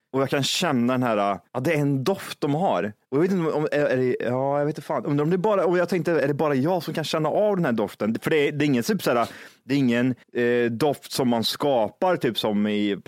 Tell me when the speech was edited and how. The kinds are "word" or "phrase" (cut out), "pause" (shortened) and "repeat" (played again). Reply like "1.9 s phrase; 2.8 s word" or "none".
1.5 s pause; 3.0 s pause; 10.2 s pause